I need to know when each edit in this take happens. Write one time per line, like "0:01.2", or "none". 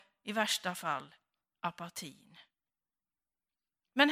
none